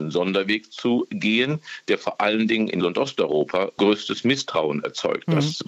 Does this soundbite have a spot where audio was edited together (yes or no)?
yes